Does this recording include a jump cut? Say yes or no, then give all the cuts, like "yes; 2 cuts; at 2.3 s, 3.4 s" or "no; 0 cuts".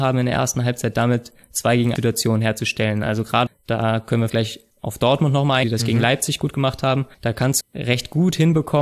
yes; 7 cuts; at 2.0 s, 3.5 s, 4.3 s, 4.7 s, 5.6 s, 7.1 s, 7.6 s